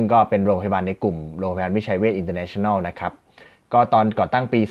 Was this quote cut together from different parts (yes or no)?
no